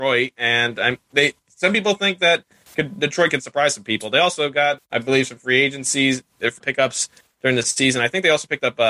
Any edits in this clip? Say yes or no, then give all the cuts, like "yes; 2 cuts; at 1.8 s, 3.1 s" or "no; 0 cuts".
yes; 2 cuts; at 4.8 s, 6.6 s